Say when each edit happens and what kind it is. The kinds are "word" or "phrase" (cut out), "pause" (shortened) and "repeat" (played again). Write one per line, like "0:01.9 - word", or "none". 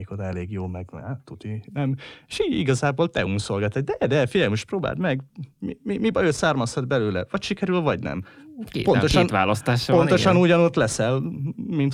none